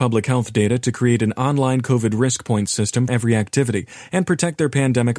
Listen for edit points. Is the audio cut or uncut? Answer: cut